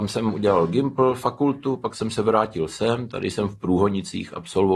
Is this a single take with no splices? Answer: yes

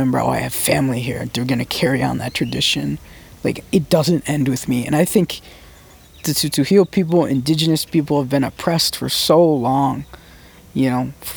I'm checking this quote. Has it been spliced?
no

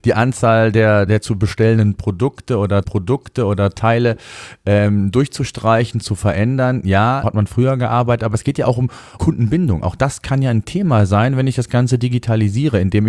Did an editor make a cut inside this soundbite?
yes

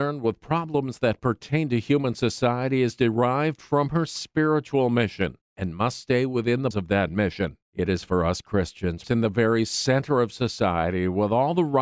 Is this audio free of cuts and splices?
no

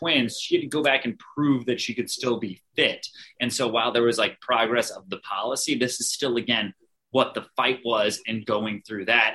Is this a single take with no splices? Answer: yes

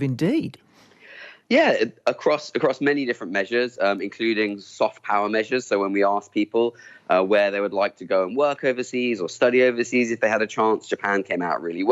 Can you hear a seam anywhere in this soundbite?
no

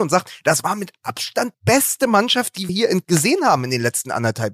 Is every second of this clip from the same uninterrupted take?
no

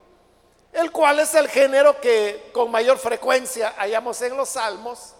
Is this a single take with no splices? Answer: yes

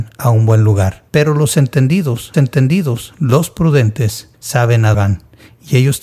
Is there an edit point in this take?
yes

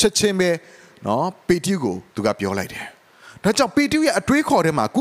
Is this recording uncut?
no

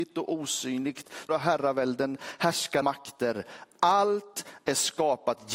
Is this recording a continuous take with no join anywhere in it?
no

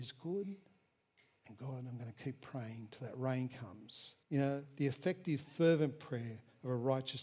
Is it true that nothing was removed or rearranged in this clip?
no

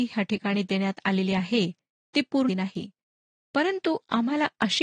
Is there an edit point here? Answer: yes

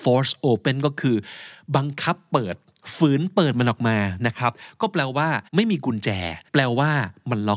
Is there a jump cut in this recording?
yes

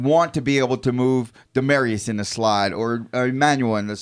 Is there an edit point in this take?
no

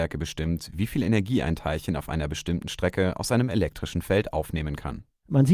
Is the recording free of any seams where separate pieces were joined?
yes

